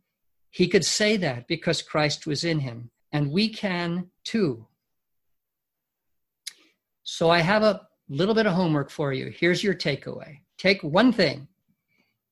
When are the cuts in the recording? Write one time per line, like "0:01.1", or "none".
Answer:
0:03.0
0:04.2
0:10.5